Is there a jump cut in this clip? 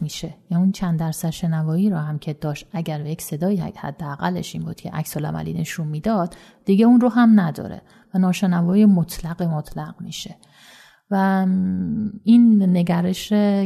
no; 0 cuts

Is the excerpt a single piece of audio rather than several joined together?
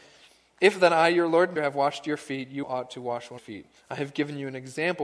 no; 4 cuts; at 1.6 s, 2.6 s, 3.4 s, 3.8 s

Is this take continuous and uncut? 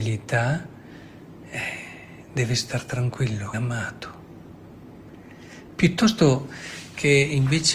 no; 1 cut; at 3.5 s

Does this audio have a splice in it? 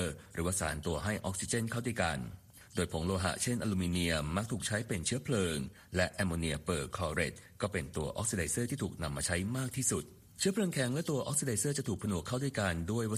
yes; 1 cut; at 10.2 s

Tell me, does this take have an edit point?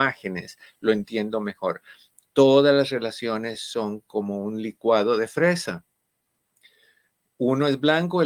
no; 0 cuts

